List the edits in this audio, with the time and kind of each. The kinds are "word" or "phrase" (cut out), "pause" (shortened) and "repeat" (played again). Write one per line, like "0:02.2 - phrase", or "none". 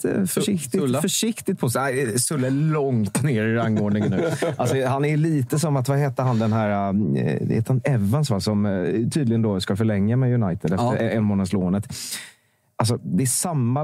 none